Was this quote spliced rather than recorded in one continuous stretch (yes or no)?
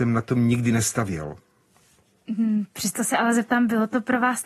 no